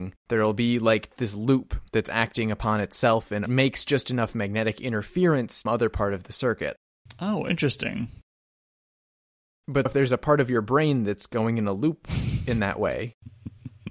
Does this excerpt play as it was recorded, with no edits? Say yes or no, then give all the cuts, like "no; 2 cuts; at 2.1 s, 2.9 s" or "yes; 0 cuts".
no; 5 cuts; at 1.2 s, 1.9 s, 3.5 s, 5.7 s, 9.9 s